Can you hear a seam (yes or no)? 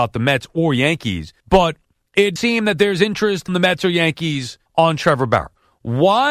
yes